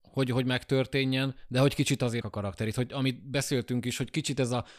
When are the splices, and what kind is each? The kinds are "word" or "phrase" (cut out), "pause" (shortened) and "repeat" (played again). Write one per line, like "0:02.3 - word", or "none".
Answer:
0:02.2 - word